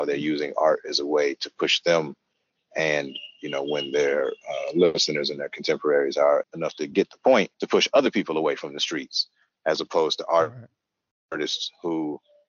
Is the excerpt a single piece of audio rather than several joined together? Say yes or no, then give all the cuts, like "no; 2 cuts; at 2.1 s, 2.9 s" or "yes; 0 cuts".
no; 2 cuts; at 6.4 s, 7.5 s